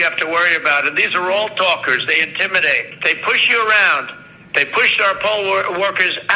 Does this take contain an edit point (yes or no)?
no